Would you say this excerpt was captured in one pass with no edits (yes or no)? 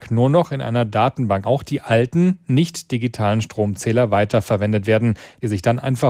no